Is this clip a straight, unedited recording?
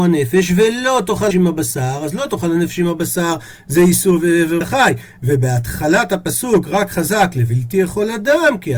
no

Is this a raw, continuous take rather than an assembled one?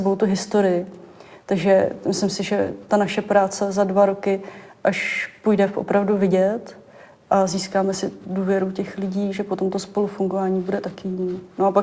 yes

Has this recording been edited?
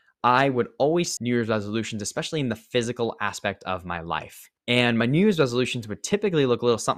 yes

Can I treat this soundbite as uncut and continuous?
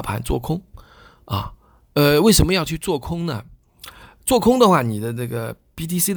yes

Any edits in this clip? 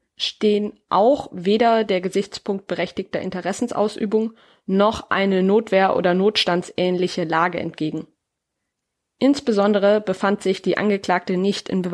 no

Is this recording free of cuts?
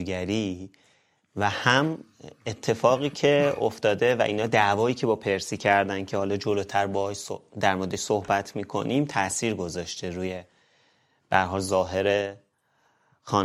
yes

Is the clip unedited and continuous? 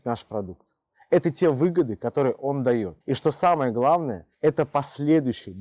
no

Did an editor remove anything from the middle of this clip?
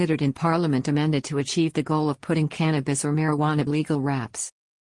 yes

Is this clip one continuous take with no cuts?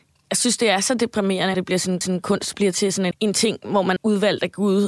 no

